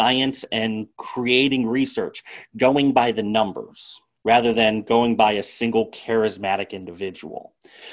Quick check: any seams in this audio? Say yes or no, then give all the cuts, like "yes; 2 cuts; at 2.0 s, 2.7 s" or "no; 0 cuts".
yes; 2 cuts; at 0.9 s, 4.2 s